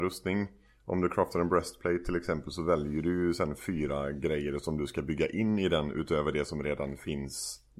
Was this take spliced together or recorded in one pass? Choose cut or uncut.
uncut